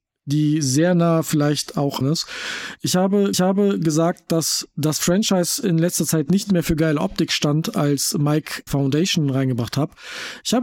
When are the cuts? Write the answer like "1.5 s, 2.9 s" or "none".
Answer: 2.0 s, 3.3 s, 8.7 s

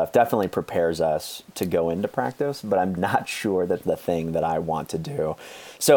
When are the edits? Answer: 3.0 s, 3.8 s

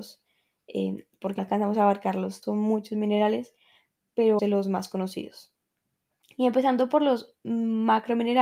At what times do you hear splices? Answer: 1.4 s, 2.4 s, 4.4 s

